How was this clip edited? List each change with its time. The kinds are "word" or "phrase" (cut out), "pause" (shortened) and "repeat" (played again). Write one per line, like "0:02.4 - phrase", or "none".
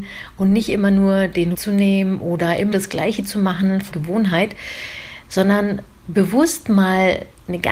0:01.5 - word
0:02.7 - word
0:03.9 - word